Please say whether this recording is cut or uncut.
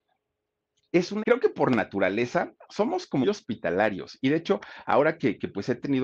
cut